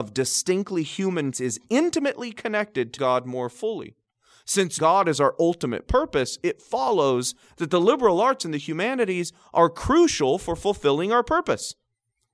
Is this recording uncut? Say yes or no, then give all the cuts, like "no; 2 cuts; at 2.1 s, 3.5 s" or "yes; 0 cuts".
no; 3 cuts; at 1.3 s, 3.0 s, 4.8 s